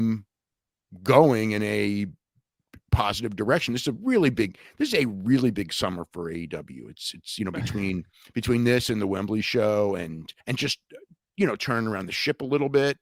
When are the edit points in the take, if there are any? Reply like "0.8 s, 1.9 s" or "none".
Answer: 10.4 s